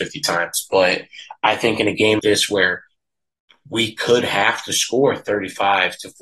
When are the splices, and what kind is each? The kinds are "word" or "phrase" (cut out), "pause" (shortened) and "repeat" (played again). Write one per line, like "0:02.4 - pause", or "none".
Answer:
0:02.2 - word